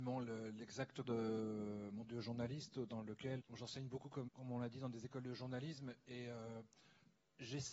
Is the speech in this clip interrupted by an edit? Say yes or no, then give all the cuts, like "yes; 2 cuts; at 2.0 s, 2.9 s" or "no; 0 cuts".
yes; 4 cuts; at 1.0 s, 2.0 s, 3.4 s, 4.3 s